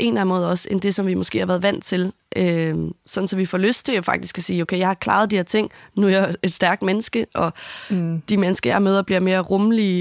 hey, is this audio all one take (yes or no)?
yes